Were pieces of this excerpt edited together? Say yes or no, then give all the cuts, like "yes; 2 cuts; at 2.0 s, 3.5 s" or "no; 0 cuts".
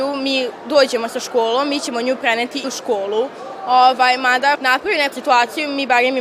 yes; 3 cuts; at 2.6 s, 4.5 s, 5.1 s